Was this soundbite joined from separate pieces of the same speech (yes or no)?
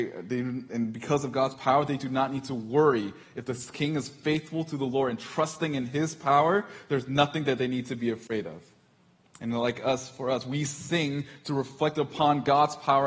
no